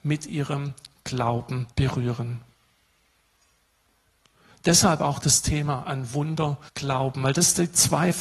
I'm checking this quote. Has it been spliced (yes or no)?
yes